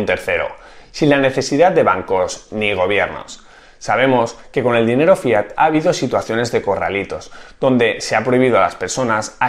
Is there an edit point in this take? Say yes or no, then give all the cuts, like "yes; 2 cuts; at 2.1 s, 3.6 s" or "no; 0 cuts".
no; 0 cuts